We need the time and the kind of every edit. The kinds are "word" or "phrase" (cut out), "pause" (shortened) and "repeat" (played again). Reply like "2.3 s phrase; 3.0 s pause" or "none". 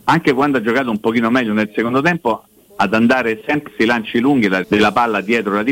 3.7 s word; 4.6 s word